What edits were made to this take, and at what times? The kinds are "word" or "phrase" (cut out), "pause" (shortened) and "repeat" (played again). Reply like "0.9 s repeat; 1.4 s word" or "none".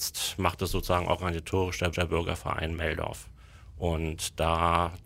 1.9 s repeat